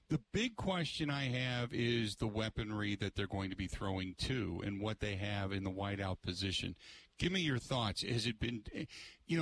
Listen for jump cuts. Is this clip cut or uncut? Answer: uncut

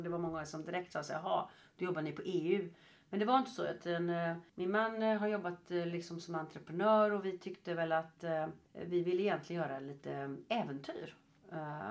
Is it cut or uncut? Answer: cut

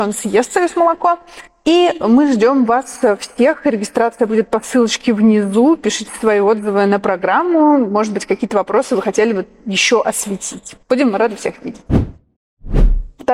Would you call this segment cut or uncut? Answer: cut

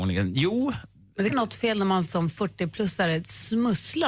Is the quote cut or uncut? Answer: cut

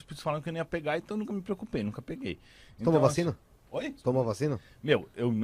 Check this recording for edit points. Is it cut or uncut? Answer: uncut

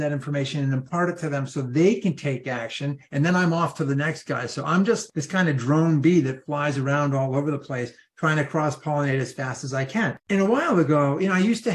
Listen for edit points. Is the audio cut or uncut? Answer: cut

